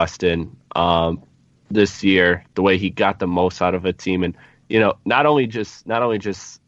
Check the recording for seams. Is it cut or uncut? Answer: uncut